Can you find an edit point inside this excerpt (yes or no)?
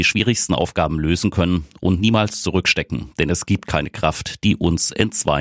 no